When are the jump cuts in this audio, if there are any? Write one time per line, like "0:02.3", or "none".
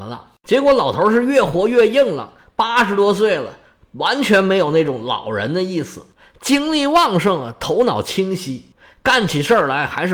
none